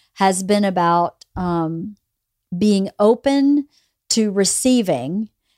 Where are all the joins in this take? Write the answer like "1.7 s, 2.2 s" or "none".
none

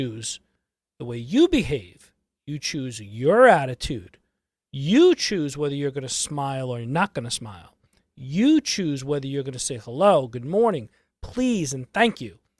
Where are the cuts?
none

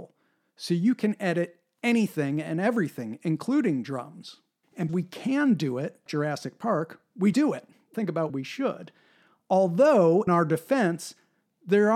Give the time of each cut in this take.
4.9 s, 6.1 s, 7.3 s, 7.9 s, 8.3 s, 10.3 s

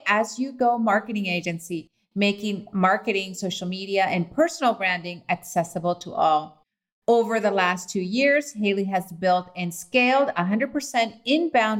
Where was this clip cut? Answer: none

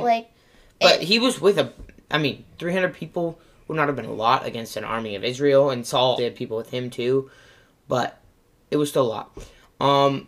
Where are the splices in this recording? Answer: 6.2 s

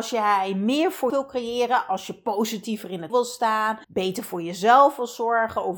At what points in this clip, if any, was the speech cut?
1.1 s, 3.1 s, 3.8 s

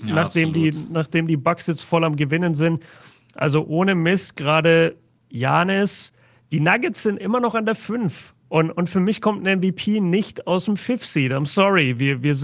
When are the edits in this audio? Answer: none

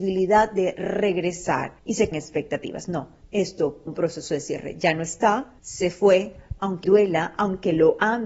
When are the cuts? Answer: 1.8 s, 2.1 s, 3.2 s, 3.9 s, 5.6 s, 6.8 s

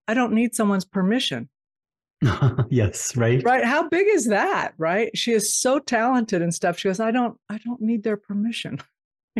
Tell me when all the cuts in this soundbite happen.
none

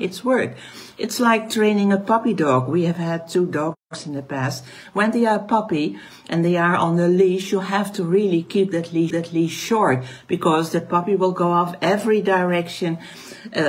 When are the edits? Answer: 9.1 s

